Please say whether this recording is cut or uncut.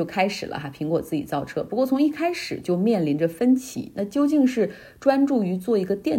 uncut